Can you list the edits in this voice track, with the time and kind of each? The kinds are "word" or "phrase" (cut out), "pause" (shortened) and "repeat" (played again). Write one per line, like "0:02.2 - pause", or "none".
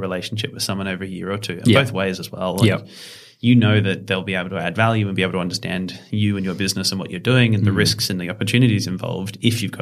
none